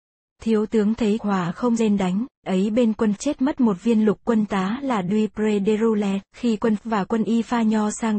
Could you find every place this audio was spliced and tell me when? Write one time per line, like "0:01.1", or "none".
0:01.2
0:01.8
0:02.4
0:03.2
0:04.5
0:06.3
0:06.8